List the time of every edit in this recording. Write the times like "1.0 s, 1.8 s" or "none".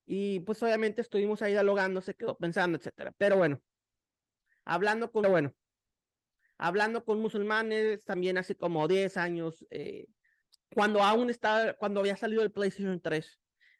5.2 s, 10.4 s